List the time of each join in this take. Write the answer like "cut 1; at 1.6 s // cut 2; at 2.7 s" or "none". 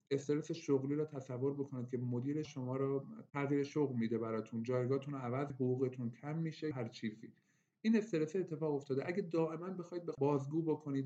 cut 1; at 2.4 s // cut 2; at 5.5 s // cut 3; at 6.7 s // cut 4; at 10.1 s